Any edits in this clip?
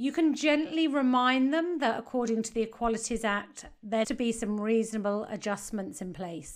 yes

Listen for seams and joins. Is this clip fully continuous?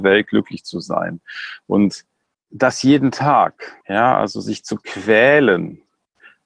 no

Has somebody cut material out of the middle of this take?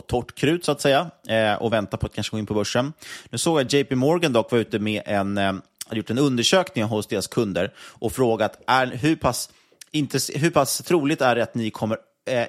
no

